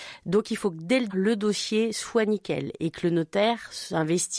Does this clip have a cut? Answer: yes; 1 cut; at 1.1 s

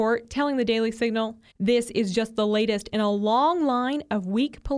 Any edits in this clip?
yes; 1 cut; at 1.5 s

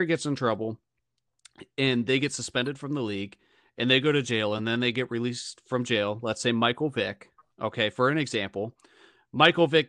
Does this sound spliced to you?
no; 0 cuts

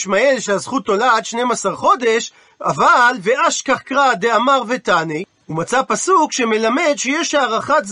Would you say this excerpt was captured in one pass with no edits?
yes; 0 cuts

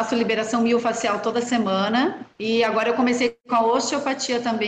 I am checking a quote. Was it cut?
yes; 1 cut; at 2.3 s

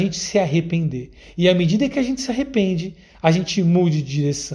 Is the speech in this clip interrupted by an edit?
no; 0 cuts

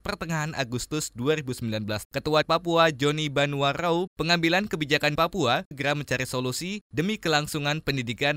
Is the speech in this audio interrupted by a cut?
yes; 5 cuts; at 2.0 s, 2.4 s, 4.1 s, 5.2 s, 5.7 s

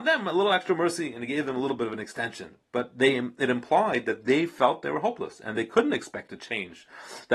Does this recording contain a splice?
no; 0 cuts

